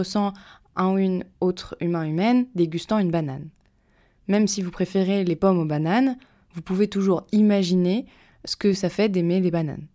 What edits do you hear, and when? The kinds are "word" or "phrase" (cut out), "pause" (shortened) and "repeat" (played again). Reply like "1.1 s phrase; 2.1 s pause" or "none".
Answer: none